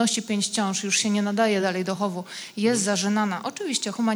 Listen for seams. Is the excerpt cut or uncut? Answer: uncut